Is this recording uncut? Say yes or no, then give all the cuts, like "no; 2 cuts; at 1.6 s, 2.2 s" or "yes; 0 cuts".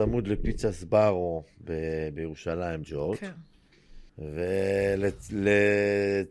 no; 2 cuts; at 2.8 s, 4.1 s